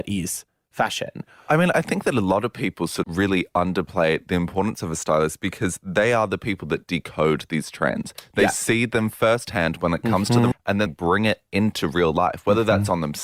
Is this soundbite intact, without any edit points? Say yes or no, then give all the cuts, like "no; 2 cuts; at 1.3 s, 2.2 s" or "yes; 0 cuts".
no; 3 cuts; at 3.0 s, 10.5 s, 10.9 s